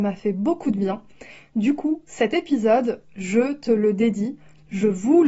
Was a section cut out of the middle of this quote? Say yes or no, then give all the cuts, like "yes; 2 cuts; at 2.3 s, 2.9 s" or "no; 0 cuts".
no; 0 cuts